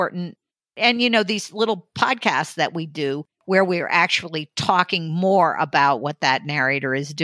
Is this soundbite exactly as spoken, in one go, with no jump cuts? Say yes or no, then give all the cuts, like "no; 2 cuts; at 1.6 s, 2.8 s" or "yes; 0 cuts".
yes; 0 cuts